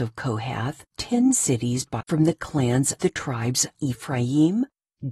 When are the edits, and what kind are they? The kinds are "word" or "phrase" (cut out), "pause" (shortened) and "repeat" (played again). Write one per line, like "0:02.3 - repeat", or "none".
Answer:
0:00.9 - word
0:02.0 - word
0:03.0 - word
0:03.7 - word